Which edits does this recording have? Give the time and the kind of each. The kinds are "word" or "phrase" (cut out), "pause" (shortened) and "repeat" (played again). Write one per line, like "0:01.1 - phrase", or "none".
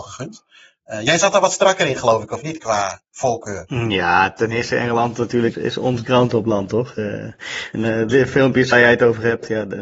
0:05.5 - word
0:07.7 - word
0:08.1 - word
0:08.7 - word